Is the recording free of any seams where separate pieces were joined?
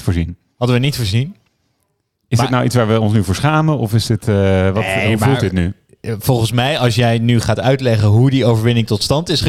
yes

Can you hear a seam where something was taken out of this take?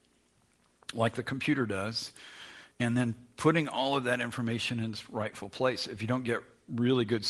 yes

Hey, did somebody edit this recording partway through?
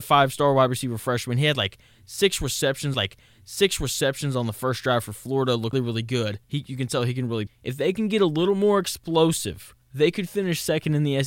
yes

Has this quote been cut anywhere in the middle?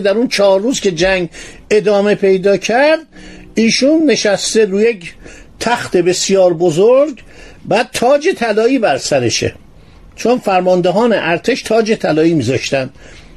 no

